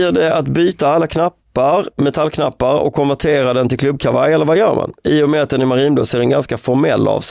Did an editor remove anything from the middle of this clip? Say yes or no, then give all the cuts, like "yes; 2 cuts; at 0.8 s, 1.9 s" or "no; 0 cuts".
no; 0 cuts